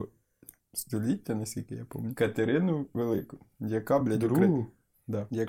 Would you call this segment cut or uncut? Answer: uncut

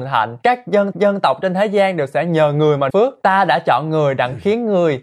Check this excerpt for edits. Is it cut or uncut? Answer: cut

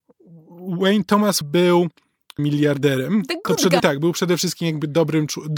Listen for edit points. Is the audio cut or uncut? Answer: cut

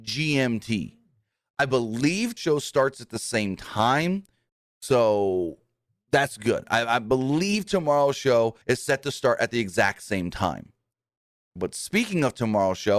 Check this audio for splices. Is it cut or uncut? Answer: cut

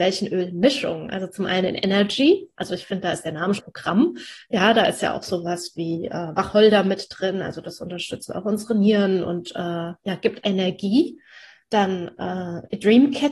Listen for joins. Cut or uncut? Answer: cut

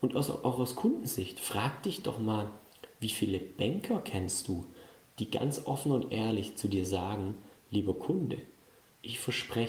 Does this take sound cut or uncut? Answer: uncut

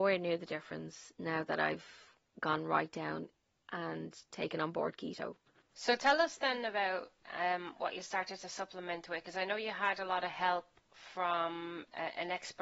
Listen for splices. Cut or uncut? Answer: uncut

